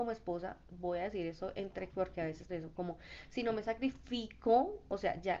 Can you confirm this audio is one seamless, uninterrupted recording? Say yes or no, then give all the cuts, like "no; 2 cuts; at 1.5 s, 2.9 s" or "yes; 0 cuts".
no; 2 cuts; at 1.9 s, 2.5 s